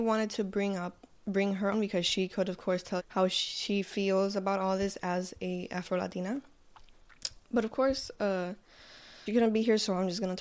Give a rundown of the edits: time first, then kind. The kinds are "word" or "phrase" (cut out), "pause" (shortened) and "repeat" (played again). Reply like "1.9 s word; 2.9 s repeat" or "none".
1.7 s word; 3.0 s word; 7.4 s pause; 9.3 s word